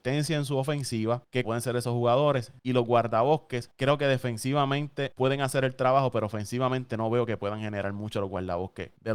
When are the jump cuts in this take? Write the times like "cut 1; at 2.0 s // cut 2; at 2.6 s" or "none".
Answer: cut 1; at 1.4 s